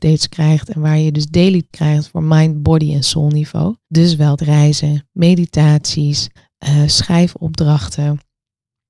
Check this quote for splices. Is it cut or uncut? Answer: cut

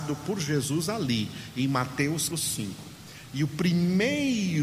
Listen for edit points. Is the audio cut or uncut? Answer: cut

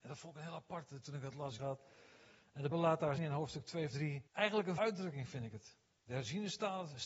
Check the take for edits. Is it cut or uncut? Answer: cut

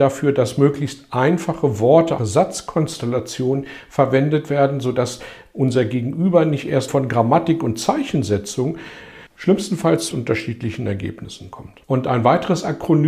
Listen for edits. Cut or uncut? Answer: cut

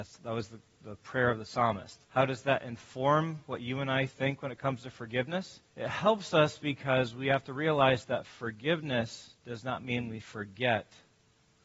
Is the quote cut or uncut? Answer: cut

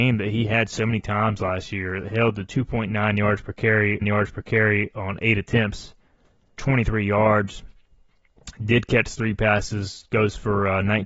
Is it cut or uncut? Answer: cut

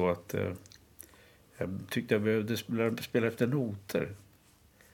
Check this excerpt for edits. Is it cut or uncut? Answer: uncut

